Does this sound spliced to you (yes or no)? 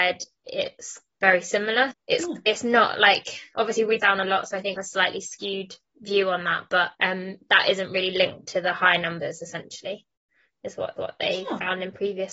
yes